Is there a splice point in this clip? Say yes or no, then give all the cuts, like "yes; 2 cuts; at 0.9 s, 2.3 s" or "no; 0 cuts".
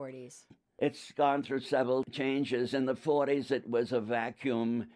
no; 0 cuts